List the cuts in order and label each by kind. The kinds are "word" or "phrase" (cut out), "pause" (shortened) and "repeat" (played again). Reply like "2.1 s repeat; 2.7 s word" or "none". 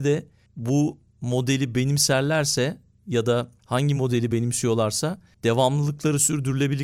none

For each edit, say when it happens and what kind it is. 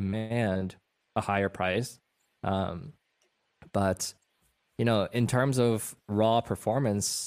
none

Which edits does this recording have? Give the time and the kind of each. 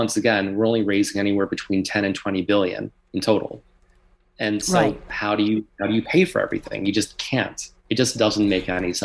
none

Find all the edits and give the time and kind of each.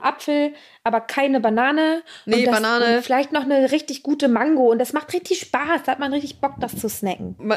none

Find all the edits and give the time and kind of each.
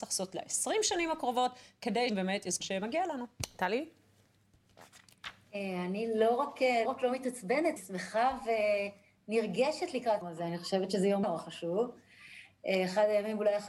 2.1 s word; 2.6 s word; 6.9 s word; 7.8 s word; 10.2 s word; 11.2 s word

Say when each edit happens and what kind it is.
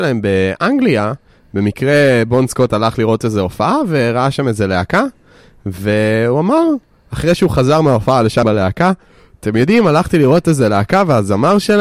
8.4 s word

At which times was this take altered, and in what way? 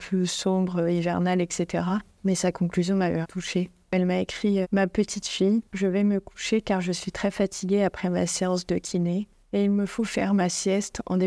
3.2 s word; 4.6 s word

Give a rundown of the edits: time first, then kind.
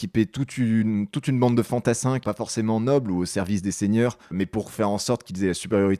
2.2 s word; 4.2 s pause

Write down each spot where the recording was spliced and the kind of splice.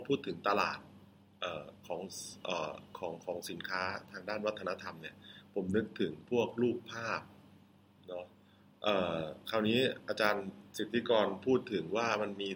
none

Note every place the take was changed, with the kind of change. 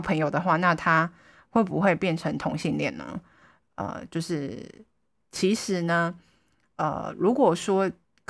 none

